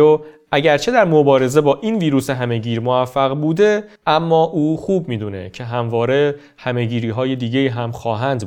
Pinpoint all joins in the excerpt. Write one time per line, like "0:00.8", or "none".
0:04.0